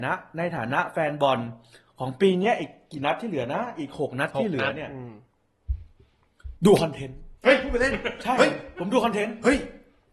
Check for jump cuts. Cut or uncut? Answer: cut